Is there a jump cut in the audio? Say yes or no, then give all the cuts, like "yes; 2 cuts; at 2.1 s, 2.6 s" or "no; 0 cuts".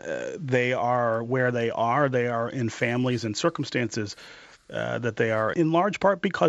yes; 1 cut; at 5.5 s